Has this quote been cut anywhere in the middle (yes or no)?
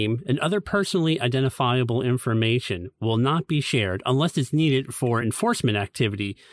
no